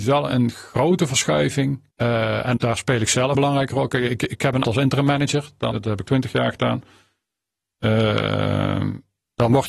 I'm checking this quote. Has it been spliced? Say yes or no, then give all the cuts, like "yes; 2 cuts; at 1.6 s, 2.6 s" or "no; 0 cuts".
yes; 6 cuts; at 1.9 s, 2.6 s, 3.3 s, 4.6 s, 5.7 s, 6.0 s